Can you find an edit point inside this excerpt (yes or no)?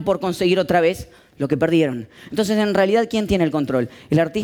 no